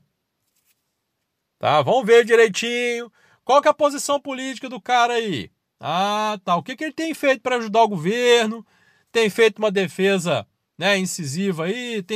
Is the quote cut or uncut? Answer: uncut